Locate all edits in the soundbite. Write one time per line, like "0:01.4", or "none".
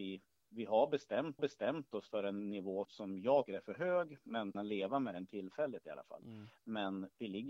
0:01.4
0:02.8
0:03.5
0:04.5

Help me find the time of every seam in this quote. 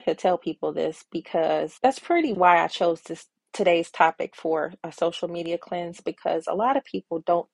0:01.8
0:02.3

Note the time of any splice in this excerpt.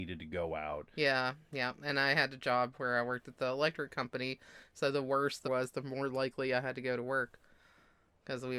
0:05.4

